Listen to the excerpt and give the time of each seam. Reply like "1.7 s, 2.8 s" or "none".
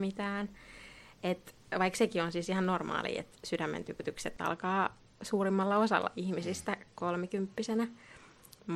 none